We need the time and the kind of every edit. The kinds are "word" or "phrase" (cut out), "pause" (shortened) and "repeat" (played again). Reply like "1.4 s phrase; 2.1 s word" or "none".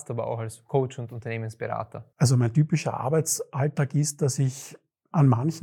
2.1 s pause